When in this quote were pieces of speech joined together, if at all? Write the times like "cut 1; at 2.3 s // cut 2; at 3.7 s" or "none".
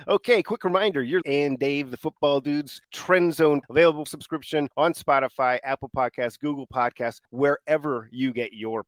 cut 1; at 1.2 s // cut 2; at 2.8 s // cut 3; at 3.6 s // cut 4; at 4.1 s // cut 5; at 4.7 s // cut 6; at 7.2 s